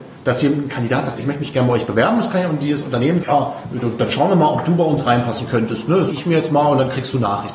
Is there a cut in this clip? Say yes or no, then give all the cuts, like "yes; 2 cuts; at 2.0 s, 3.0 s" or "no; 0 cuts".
yes; 3 cuts; at 1.2 s, 3.2 s, 6.1 s